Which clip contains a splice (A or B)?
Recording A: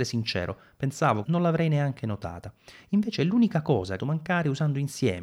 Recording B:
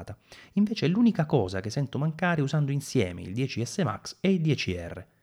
A